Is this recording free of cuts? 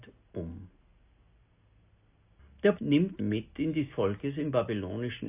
no; 3 cuts; at 2.8 s, 3.2 s, 3.9 s

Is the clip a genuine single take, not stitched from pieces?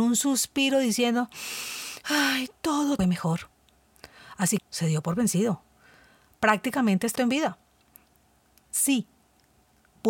no; 3 cuts; at 3.0 s, 4.6 s, 7.2 s

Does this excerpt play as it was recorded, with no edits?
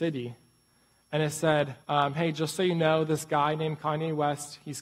no; 1 cut; at 1.8 s

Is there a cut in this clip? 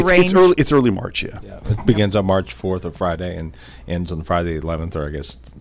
no; 0 cuts

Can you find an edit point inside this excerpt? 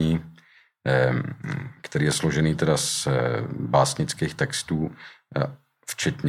no; 0 cuts

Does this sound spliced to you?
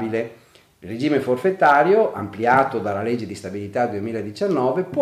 no; 0 cuts

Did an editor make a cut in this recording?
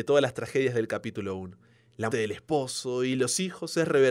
yes; 1 cut; at 2.1 s

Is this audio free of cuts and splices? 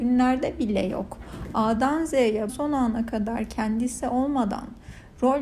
no; 1 cut; at 2.5 s

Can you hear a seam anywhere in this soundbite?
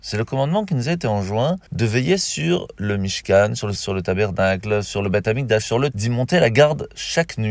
yes; 4 cuts; at 1.7 s, 3.8 s, 4.8 s, 5.9 s

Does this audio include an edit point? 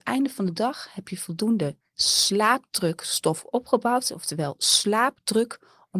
no; 0 cuts

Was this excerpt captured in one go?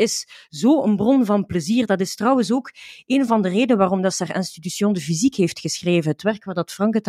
yes; 0 cuts

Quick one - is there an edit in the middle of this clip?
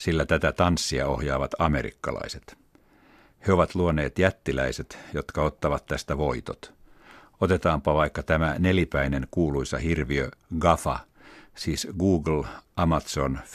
no; 0 cuts

